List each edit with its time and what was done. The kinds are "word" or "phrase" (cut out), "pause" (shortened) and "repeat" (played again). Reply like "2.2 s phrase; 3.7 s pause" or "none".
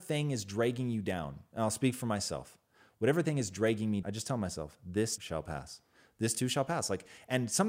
4.0 s word; 5.2 s word